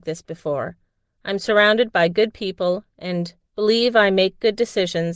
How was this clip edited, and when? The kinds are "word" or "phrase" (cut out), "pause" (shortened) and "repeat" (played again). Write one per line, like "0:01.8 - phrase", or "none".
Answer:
none